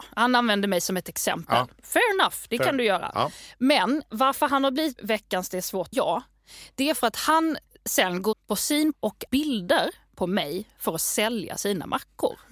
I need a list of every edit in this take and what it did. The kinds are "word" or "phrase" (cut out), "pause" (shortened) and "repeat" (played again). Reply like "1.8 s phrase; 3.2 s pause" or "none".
4.1 s word; 5.0 s word; 5.9 s word; 8.3 s word; 8.9 s word; 9.3 s word